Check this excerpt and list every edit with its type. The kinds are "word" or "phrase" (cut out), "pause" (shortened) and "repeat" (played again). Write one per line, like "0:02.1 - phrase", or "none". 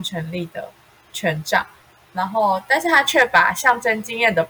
none